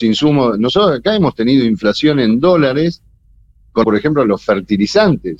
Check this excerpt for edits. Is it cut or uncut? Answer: cut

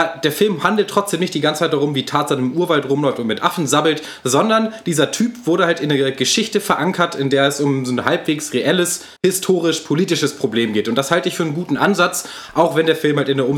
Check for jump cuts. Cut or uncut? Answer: cut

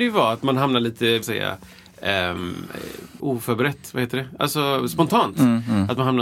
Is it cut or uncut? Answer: cut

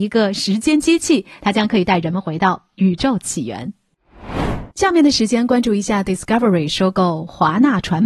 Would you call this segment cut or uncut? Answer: cut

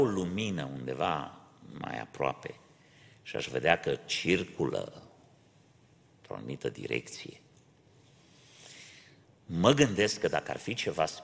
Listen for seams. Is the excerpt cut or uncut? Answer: uncut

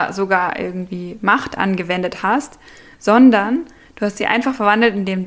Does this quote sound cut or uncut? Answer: uncut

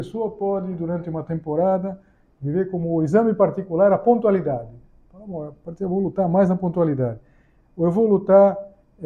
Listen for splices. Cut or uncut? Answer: uncut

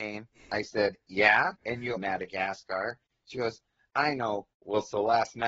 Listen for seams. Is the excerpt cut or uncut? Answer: cut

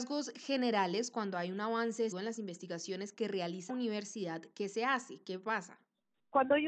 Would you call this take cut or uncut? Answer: cut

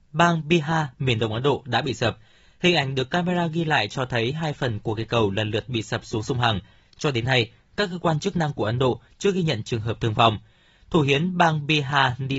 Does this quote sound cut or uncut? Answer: uncut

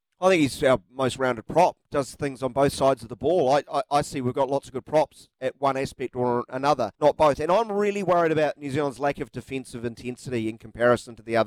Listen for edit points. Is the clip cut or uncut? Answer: cut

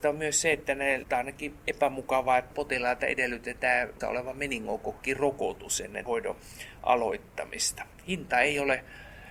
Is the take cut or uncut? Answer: cut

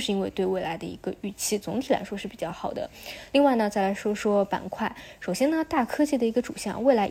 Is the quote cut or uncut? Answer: uncut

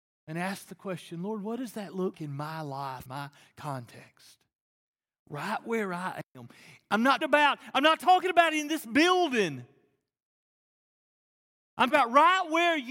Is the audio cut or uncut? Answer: cut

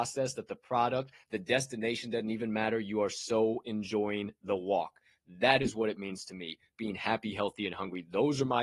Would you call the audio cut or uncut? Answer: uncut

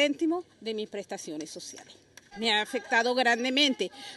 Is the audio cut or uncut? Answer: uncut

